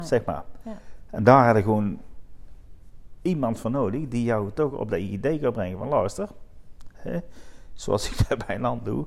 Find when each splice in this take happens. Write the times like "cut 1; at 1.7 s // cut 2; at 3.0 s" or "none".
none